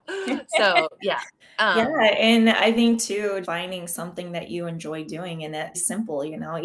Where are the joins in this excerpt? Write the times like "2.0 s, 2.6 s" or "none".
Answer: 1.4 s, 3.4 s, 5.7 s